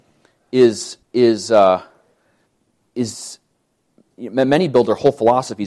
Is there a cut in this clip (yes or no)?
yes